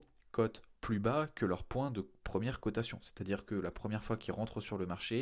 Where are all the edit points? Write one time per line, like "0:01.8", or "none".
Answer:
none